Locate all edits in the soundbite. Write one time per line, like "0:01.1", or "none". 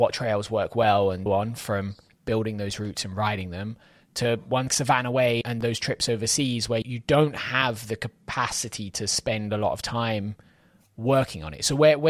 0:01.3
0:04.7
0:05.4
0:06.8

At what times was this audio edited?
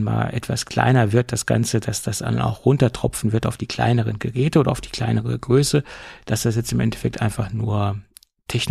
none

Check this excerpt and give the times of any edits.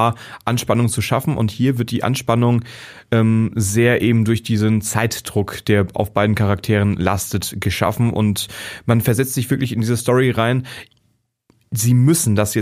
none

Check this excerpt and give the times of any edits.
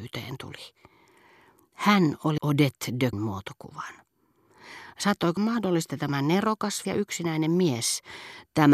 0:02.4
0:03.1
0:05.4
0:05.9
0:06.8

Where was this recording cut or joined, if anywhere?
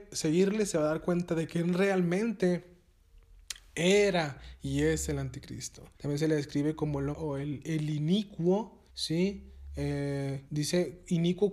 0:05.9
0:07.1
0:08.9
0:10.5

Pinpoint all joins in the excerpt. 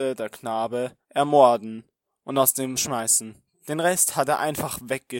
0:01.0
0:02.8

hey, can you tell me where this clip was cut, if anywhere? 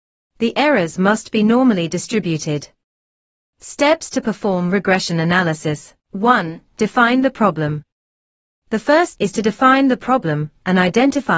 0:06.0
0:09.1

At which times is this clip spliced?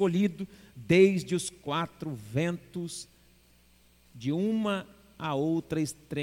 none

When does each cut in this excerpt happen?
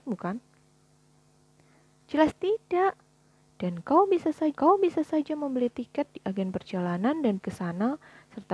0:04.5
0:07.4

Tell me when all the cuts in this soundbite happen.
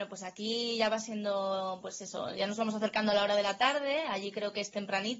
none

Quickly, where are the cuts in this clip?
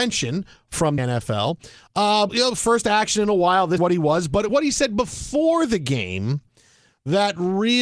0:01.0
0:02.3
0:03.8
0:04.5

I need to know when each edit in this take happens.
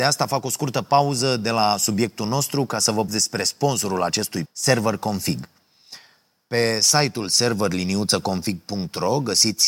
0:03.1
0:04.5

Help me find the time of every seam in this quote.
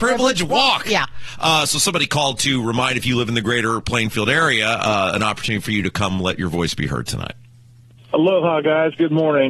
none

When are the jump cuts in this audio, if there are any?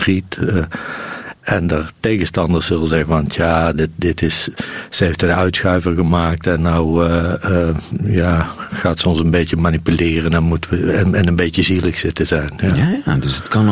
none

